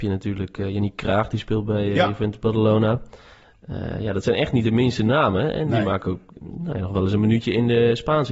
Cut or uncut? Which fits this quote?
uncut